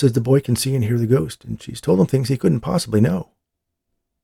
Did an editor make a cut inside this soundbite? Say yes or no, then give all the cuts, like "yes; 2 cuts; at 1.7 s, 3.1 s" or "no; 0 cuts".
no; 0 cuts